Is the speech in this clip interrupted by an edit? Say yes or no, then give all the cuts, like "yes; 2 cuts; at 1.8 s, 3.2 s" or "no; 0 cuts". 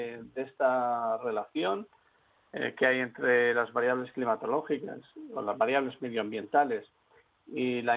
no; 0 cuts